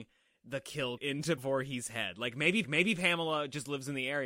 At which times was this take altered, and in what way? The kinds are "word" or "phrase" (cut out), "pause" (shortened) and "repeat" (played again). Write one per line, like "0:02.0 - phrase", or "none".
0:01.0 - word
0:01.4 - word
0:02.6 - repeat

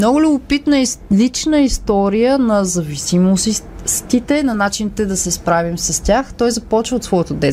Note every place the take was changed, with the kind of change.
none

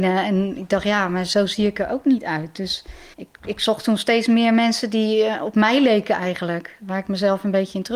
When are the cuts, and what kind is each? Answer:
0:03.1 - pause

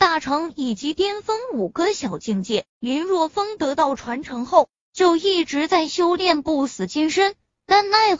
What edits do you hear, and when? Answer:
0:02.7 - pause

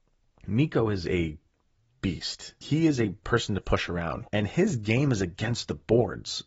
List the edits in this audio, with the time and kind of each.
0:02.6 - word
0:03.2 - word
0:04.3 - pause

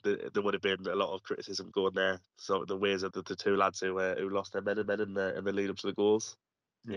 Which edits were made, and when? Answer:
0:01.7 - word
0:02.3 - pause
0:03.1 - word
0:04.8 - repeat

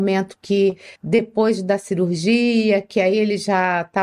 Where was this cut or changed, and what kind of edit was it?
0:01.0 - pause

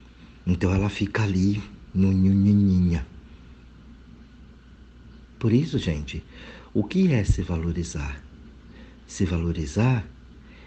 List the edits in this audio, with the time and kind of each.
0:09.0 - pause

